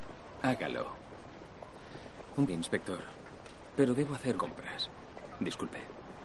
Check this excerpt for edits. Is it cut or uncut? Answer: cut